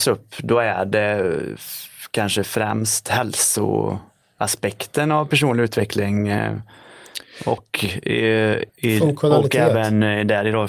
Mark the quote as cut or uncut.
cut